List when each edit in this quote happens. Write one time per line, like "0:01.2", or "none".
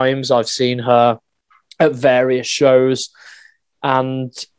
none